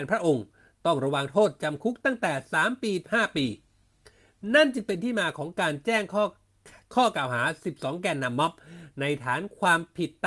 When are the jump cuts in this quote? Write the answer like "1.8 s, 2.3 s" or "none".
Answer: 3.0 s